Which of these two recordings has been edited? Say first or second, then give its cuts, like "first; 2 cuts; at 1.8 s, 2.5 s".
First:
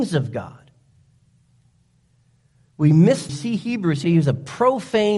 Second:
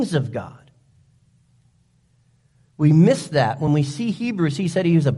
first; 2 cuts; at 3.3 s, 4.0 s